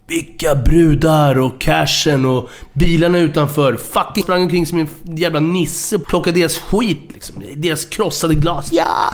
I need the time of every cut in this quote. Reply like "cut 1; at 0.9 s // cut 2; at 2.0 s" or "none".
cut 1; at 4.2 s // cut 2; at 6.0 s